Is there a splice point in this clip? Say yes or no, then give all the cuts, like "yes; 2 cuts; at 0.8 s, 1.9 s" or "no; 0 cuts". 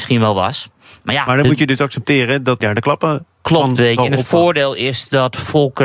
yes; 1 cut; at 2.6 s